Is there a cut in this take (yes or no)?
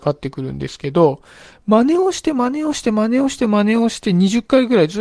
no